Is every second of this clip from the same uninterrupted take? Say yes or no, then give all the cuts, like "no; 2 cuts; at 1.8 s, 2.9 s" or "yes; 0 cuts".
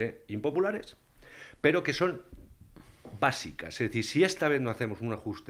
yes; 0 cuts